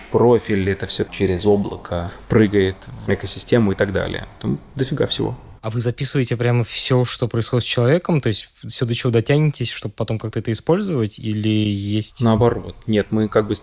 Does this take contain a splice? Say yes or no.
yes